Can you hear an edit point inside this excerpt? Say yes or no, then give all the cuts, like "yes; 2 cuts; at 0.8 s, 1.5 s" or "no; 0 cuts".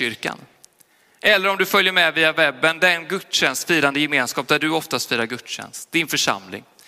no; 0 cuts